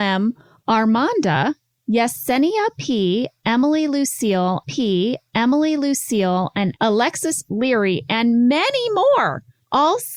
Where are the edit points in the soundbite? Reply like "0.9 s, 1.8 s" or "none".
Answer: 4.6 s